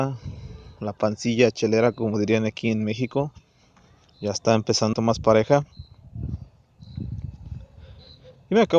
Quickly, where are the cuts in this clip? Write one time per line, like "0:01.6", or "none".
0:04.9

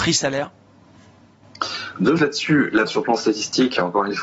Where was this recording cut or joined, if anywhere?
0:02.2
0:02.9

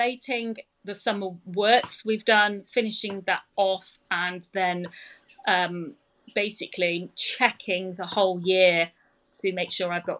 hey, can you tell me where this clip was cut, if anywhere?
none

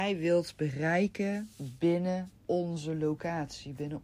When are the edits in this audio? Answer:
0:02.4

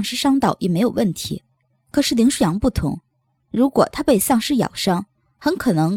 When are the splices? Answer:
none

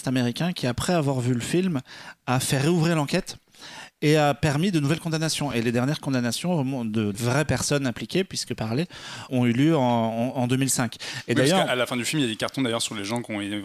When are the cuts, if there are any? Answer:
0:07.1
0:08.6
0:09.3

